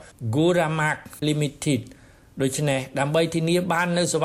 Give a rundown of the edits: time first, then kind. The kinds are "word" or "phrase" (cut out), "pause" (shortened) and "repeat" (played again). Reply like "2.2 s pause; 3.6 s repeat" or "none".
1.2 s word